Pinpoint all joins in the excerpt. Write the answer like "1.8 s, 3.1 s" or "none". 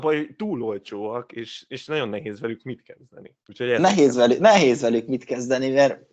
3.4 s